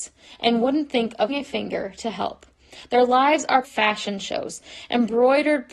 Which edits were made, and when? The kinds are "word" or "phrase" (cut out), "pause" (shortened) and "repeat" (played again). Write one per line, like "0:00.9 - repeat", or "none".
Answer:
0:01.3 - word
0:03.6 - word